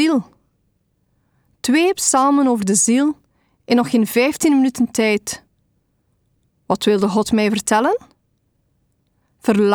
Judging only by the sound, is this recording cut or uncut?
uncut